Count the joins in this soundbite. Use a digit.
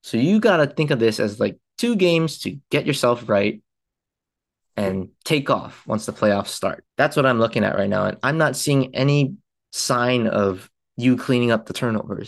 1